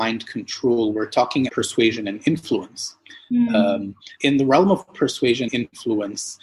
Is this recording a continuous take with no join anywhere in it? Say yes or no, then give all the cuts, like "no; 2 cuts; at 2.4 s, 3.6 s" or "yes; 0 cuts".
no; 3 cuts; at 1.5 s, 4.2 s, 5.5 s